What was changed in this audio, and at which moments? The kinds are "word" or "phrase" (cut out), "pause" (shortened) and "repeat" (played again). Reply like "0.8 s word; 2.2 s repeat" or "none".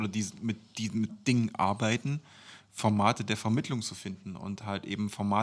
none